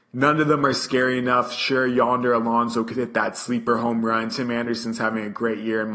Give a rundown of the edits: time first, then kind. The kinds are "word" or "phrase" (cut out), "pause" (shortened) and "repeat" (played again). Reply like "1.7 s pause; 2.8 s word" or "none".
none